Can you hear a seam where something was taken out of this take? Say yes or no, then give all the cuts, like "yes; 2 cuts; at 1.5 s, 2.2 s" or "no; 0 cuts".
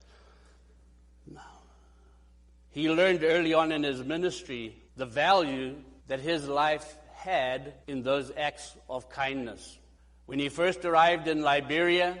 yes; 4 cuts; at 4.9 s, 6.0 s, 7.8 s, 10.0 s